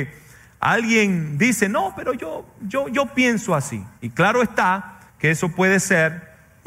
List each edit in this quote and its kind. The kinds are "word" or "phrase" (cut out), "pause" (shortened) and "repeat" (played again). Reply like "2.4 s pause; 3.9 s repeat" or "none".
4.0 s pause; 5.1 s pause